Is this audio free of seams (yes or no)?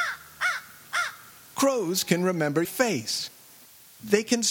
no